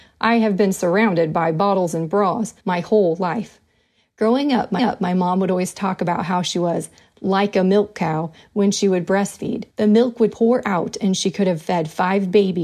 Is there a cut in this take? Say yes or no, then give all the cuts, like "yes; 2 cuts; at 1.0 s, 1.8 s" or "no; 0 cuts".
yes; 4 cuts; at 2.6 s, 4.8 s, 9.7 s, 10.3 s